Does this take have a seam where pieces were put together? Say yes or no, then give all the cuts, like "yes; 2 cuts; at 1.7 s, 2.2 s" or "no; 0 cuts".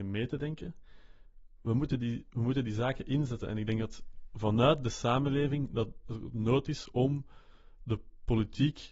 no; 0 cuts